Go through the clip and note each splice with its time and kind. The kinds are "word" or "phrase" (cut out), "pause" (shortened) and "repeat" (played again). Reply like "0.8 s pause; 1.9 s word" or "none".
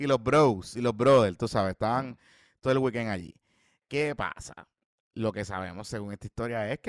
none

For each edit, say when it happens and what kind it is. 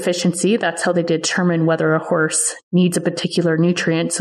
none

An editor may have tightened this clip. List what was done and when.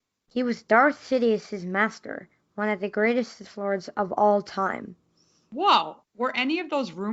6.0 s pause

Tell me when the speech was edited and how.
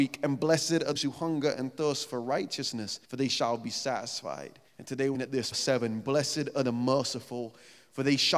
1.0 s word; 3.0 s pause; 4.7 s pause; 5.1 s word; 5.5 s word

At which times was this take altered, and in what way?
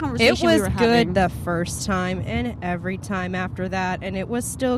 none

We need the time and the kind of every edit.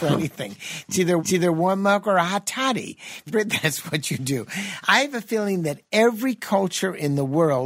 1.2 s repeat; 3.3 s word

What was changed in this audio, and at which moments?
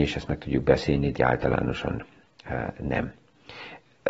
1.2 s word

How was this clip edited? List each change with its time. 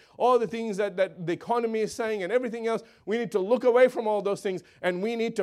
none

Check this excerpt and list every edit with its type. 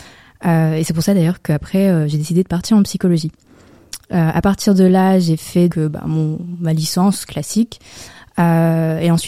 5.7 s word

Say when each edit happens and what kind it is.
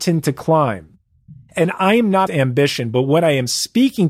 2.3 s word

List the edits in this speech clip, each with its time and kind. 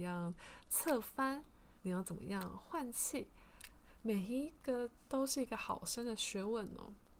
1.8 s pause

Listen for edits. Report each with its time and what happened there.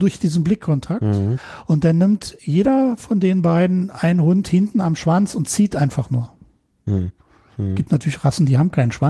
none

